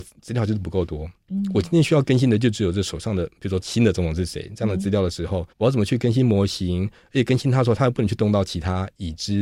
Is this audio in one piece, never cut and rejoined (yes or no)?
no